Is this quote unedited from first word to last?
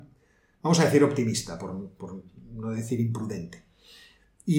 yes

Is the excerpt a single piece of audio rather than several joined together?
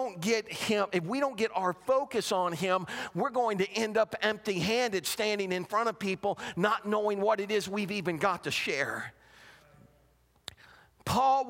yes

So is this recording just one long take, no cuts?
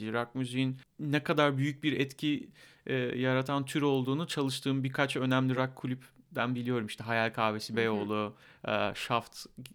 yes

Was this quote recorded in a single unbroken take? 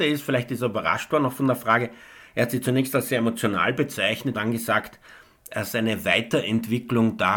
no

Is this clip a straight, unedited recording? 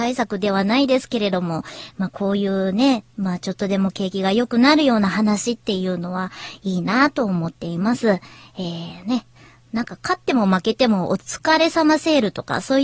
yes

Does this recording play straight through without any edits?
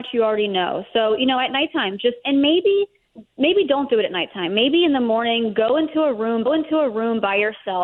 no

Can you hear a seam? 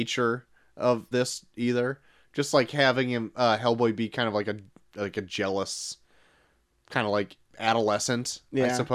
yes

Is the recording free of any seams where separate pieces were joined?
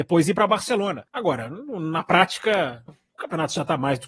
no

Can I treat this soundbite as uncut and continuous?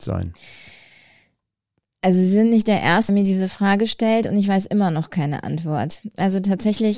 no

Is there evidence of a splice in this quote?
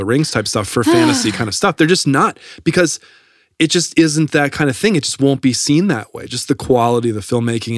no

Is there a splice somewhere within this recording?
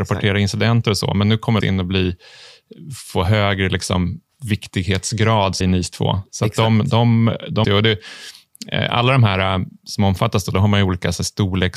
yes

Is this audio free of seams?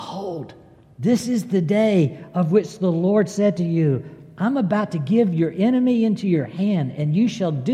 yes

